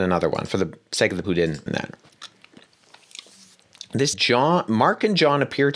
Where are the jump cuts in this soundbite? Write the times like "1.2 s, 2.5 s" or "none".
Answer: 1.2 s, 1.7 s, 4.1 s